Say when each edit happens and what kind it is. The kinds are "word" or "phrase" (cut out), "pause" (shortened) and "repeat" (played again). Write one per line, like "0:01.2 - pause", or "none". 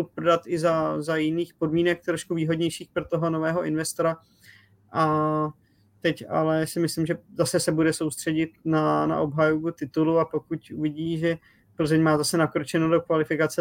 none